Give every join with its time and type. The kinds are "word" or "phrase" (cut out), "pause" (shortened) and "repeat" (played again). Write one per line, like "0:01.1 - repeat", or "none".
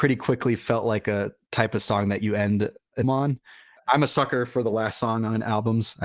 0:03.0 - word